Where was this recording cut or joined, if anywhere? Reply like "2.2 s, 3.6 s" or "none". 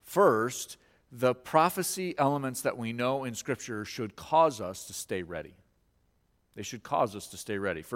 none